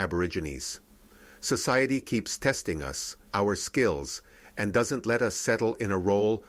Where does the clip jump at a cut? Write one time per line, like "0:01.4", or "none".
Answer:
0:03.3